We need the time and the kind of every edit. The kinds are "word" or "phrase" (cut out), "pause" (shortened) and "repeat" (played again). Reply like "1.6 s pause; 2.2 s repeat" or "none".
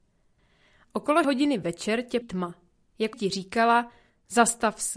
1.2 s word; 2.2 s word; 3.1 s word